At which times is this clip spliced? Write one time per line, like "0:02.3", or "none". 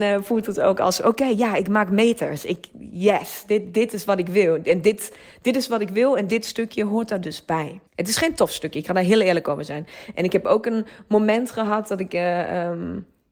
0:07.9